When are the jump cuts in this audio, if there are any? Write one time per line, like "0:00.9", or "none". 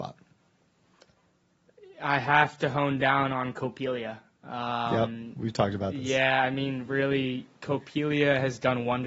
none